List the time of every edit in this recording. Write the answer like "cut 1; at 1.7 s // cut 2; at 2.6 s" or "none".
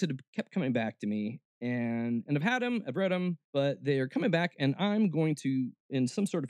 cut 1; at 3.4 s